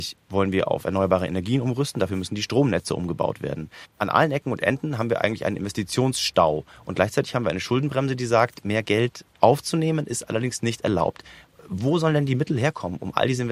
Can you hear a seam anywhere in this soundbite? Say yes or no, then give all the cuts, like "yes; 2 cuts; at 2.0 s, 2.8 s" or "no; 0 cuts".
no; 0 cuts